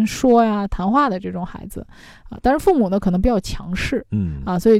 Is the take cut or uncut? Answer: uncut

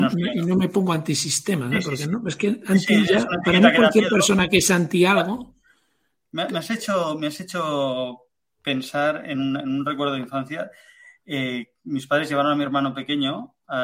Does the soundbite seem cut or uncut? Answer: uncut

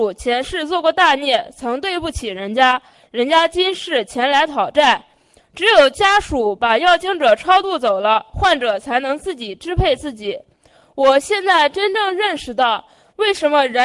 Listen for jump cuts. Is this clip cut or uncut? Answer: uncut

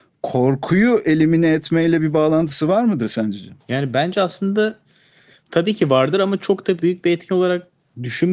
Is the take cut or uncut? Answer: cut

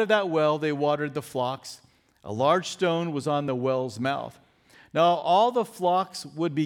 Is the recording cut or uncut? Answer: uncut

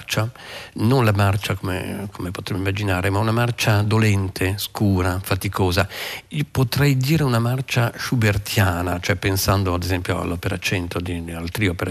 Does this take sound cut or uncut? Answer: uncut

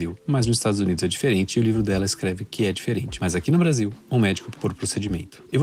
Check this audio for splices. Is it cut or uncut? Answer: cut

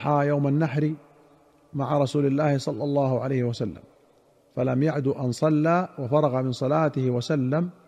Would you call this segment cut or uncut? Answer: uncut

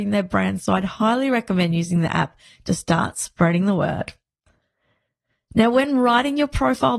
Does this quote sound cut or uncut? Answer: uncut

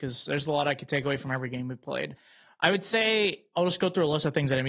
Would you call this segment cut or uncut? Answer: uncut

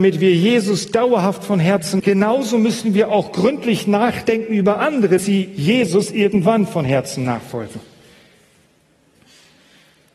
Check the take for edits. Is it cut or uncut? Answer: cut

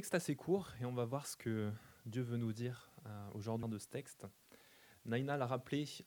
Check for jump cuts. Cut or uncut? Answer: cut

